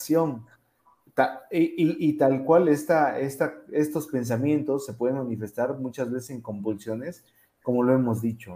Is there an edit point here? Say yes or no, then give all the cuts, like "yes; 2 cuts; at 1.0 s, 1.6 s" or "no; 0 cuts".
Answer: no; 0 cuts